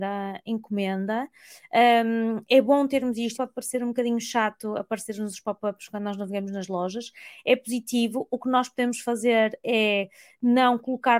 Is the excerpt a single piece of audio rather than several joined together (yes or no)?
no